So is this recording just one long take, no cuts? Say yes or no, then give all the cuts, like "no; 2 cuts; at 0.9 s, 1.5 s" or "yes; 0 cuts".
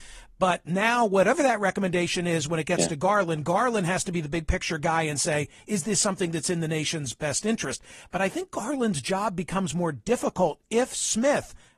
yes; 0 cuts